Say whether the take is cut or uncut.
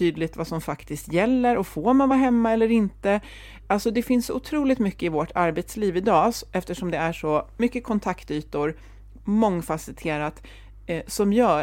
uncut